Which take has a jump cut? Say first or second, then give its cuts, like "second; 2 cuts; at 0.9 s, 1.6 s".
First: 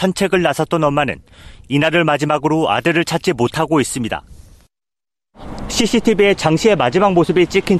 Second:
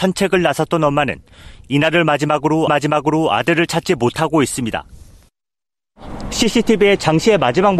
second; 1 cut; at 2.7 s